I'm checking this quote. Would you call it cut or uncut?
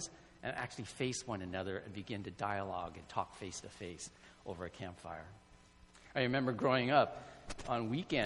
uncut